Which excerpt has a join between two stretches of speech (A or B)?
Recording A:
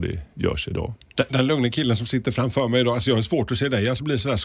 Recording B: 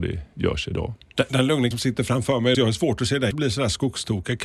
B